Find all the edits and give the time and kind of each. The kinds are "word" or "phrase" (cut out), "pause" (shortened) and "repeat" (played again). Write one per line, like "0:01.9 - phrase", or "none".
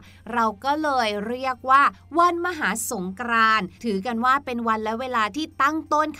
0:03.8 - pause